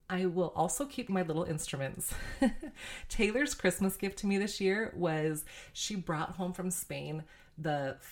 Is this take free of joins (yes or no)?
no